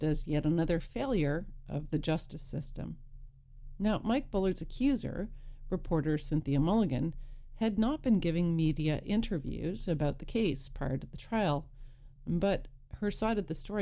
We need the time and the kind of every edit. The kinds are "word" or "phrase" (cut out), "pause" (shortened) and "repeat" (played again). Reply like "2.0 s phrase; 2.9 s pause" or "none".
none